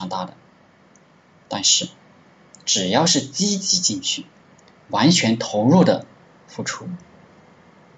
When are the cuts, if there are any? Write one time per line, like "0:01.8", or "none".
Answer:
none

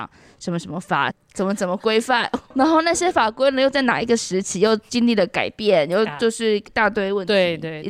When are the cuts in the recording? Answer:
0:02.4

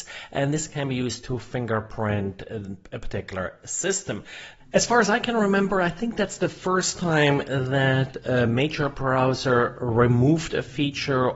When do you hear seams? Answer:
none

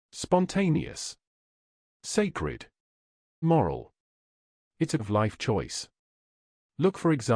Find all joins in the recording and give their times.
0:03.4
0:05.0

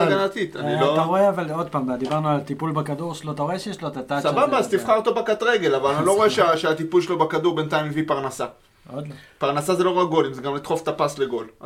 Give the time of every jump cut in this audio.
none

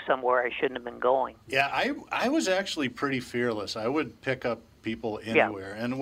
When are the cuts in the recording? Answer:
0:01.4

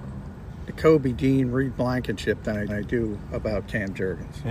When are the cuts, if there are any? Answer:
0:02.7

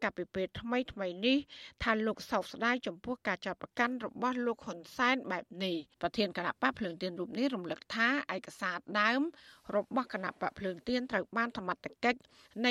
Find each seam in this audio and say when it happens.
0:05.9

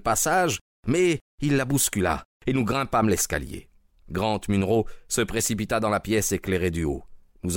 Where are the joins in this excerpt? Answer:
none

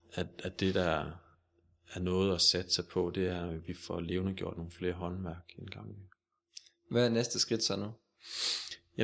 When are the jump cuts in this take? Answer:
none

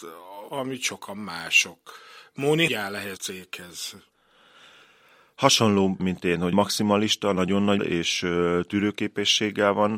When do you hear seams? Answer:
0:02.7
0:03.2
0:06.0
0:06.5
0:07.8

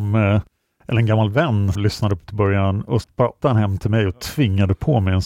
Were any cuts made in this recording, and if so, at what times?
0:01.7
0:02.3
0:03.0
0:03.4

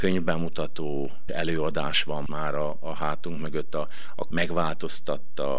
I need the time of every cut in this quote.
0:01.3
0:02.3
0:04.3

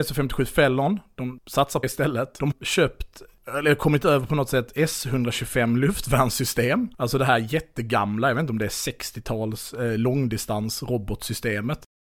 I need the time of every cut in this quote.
0:01.8
0:02.5

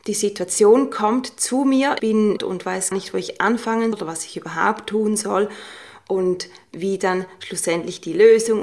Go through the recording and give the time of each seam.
0:02.0
0:02.4
0:02.9
0:03.9

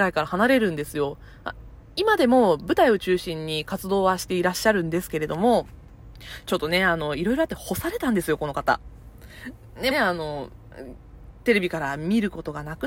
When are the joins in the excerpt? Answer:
0:09.9

